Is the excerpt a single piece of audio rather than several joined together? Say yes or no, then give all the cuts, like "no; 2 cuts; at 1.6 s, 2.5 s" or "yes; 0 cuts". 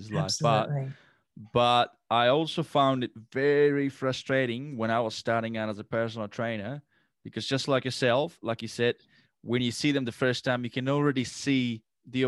yes; 0 cuts